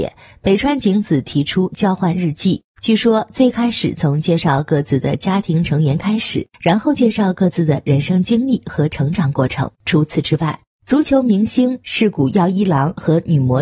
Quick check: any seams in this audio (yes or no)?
yes